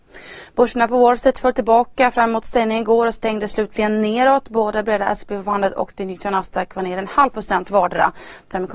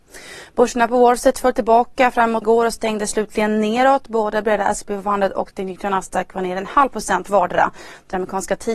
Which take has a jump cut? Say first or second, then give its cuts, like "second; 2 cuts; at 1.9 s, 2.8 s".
second; 1 cut; at 2.4 s